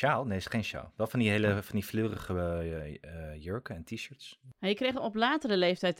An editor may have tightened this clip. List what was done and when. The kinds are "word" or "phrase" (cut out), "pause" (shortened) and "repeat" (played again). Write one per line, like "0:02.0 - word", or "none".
none